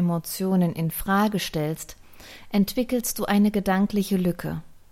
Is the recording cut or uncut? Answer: uncut